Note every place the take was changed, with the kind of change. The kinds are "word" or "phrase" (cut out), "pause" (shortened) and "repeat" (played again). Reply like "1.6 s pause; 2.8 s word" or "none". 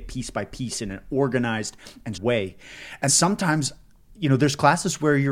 2.1 s word; 3.1 s word

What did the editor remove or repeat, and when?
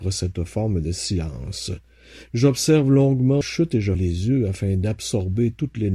3.4 s word; 3.9 s word

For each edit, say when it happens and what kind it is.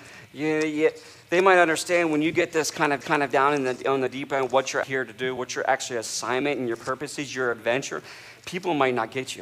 3.0 s repeat; 4.8 s word

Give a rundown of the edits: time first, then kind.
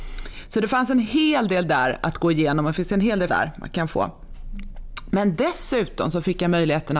3.3 s word

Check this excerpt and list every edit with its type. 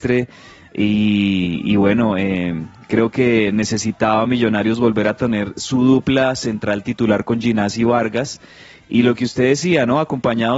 none

